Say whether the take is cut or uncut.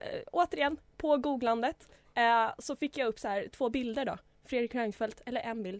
uncut